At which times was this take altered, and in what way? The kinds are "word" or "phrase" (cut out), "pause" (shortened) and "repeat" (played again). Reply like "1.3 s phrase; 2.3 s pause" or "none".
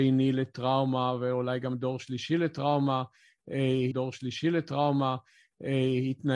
3.9 s repeat